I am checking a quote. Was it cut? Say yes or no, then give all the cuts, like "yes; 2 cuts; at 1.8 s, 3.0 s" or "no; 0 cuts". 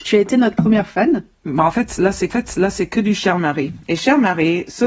yes; 1 cut; at 2.3 s